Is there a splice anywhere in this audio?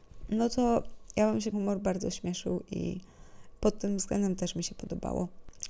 yes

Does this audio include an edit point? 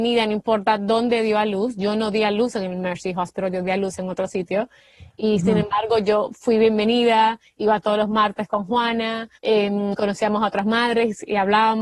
yes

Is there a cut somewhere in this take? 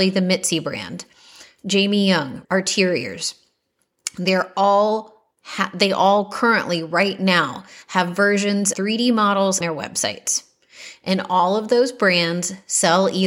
yes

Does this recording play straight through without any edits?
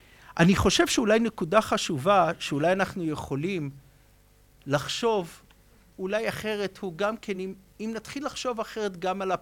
yes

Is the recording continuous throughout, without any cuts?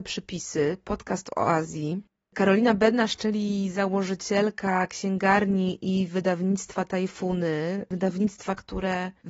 yes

